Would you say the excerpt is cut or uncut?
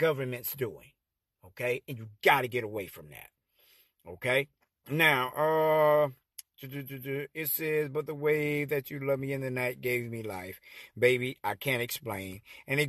cut